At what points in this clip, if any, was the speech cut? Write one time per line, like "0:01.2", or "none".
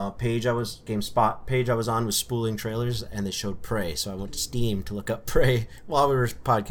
none